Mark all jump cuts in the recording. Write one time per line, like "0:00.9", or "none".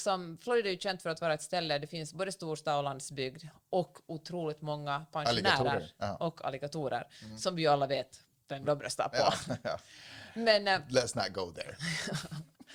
none